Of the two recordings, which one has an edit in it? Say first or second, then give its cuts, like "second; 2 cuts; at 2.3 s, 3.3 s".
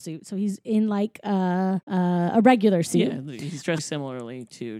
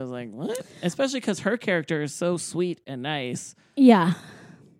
first; 2 cuts; at 1.8 s, 3.8 s